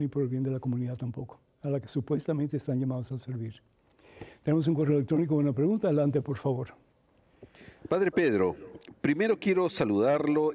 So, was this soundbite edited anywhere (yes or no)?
no